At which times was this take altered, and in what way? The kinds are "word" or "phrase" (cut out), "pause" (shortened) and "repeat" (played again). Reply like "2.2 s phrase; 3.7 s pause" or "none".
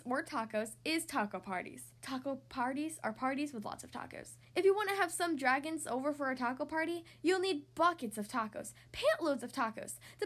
2.0 s pause; 4.4 s pause